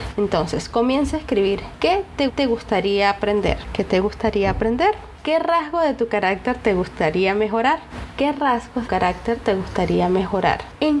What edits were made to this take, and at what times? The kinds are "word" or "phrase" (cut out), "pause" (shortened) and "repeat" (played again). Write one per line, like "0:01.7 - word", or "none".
0:02.3 - repeat
0:08.9 - phrase